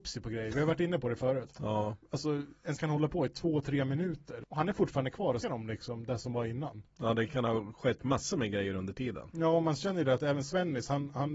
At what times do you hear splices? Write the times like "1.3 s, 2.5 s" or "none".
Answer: 2.8 s, 5.4 s